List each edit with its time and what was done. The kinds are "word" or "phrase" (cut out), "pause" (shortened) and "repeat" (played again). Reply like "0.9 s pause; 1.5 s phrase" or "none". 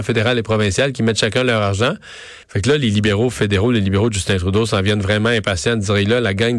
2.4 s pause

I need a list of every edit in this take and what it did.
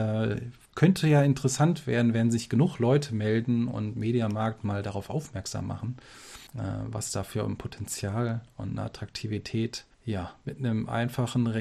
6.5 s pause; 9.9 s pause

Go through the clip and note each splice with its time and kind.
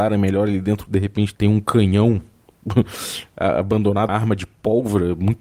1.3 s word; 4.1 s word

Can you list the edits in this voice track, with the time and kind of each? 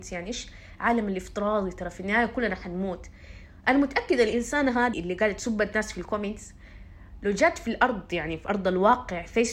4.9 s word

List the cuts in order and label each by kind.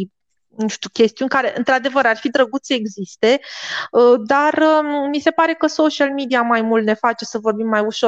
none

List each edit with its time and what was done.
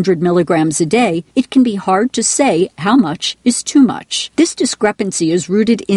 1.3 s pause; 4.3 s pause

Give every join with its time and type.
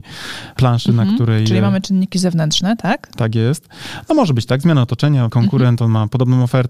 5.3 s word

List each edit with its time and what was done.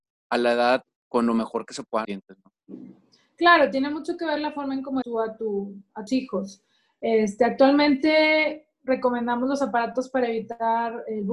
1.0 s word; 2.0 s word; 5.0 s word; 6.1 s word

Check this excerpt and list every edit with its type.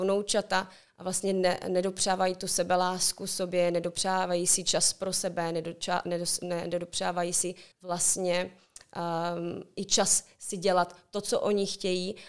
7.7 s pause

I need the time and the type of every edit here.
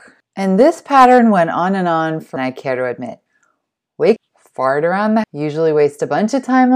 2.4 s phrase; 4.2 s word; 5.2 s word

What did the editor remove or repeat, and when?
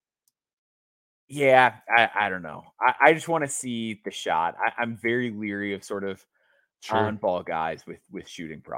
none

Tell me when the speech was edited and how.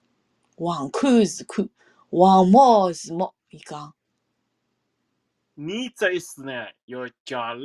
none

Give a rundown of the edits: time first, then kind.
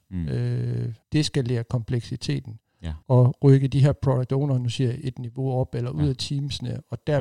1.0 s pause; 3.0 s pause

